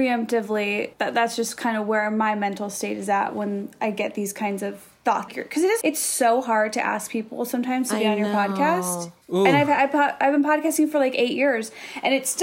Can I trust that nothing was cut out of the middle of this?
no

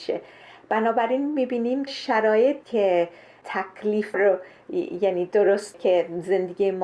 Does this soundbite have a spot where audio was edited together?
yes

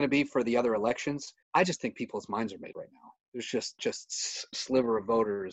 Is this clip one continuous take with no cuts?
no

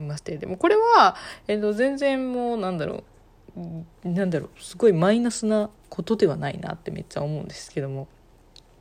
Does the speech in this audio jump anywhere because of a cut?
no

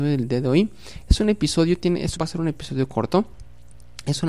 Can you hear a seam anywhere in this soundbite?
yes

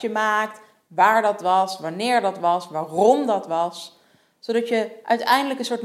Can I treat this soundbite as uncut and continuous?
yes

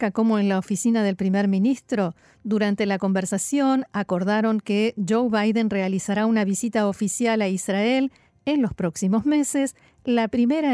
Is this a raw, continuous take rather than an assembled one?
yes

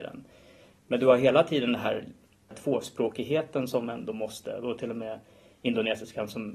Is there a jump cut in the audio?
no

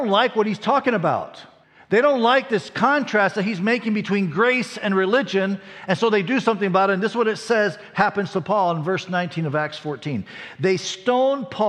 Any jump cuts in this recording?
yes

